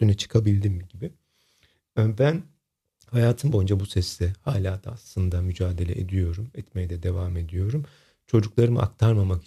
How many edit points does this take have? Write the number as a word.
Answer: zero